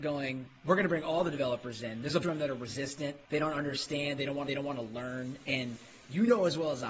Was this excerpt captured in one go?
no; 3 cuts; at 2.2 s, 3.2 s, 4.5 s

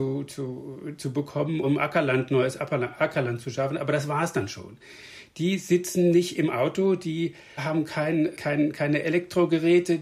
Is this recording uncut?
no; 3 cuts; at 1.6 s, 7.6 s, 8.4 s

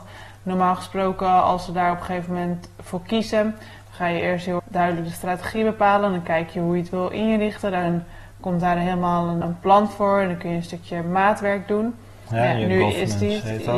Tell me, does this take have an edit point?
yes; 2 cuts; at 4.6 s, 9.4 s

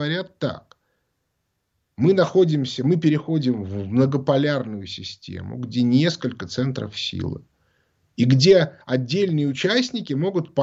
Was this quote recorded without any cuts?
yes; 0 cuts

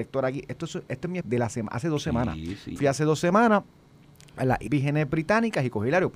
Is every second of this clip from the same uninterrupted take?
no; 3 cuts; at 1.2 s, 2.8 s, 4.7 s

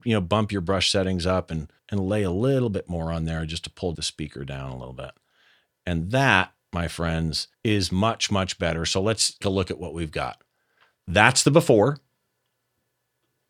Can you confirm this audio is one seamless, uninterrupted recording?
no; 4 cuts; at 1.8 s, 3.9 s, 7.5 s, 9.4 s

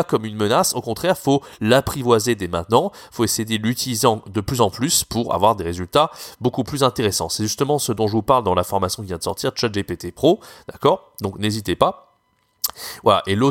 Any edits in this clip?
no; 0 cuts

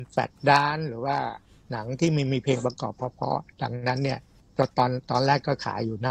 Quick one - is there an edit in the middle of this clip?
no; 0 cuts

